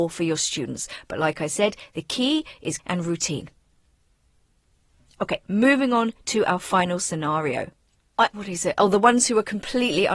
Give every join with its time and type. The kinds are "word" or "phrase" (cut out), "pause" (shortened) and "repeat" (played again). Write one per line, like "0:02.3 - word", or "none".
0:02.8 - word
0:08.3 - word